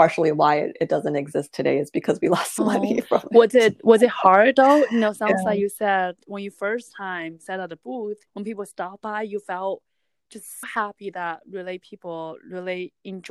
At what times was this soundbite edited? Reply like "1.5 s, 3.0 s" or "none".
2.6 s, 8.3 s, 10.6 s